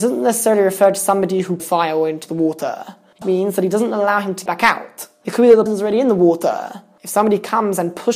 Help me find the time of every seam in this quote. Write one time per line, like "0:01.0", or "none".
0:01.6
0:03.2
0:04.5
0:05.7

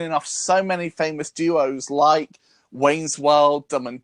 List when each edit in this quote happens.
none

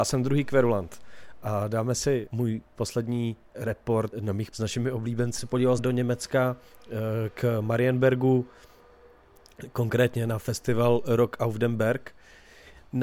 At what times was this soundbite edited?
0:02.3
0:04.1
0:04.5
0:05.4
0:05.8

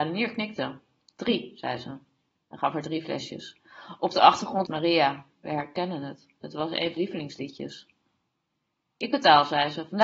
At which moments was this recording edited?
0:04.7
0:06.9

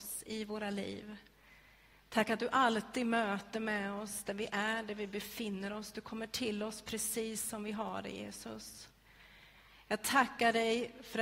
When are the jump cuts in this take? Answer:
none

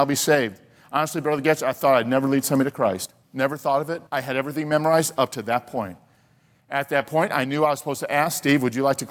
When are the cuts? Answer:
0:03.2
0:04.1

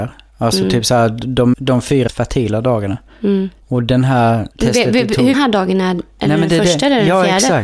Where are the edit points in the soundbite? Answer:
0:01.5
0:02.1
0:04.5
0:05.3

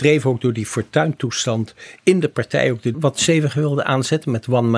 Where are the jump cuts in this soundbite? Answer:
0:02.9

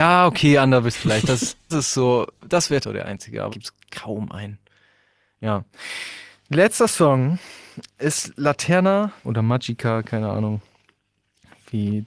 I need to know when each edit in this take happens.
0:00.9
0:01.7
0:02.8
0:03.5
0:08.0
0:09.2

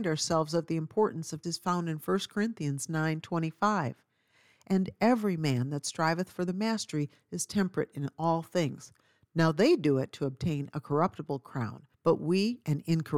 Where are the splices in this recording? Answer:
0:01.4
0:11.9

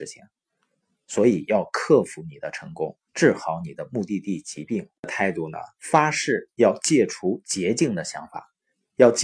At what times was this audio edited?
0:03.1
0:05.0

